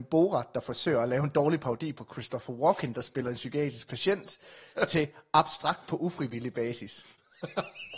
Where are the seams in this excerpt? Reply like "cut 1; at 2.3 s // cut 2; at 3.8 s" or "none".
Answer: none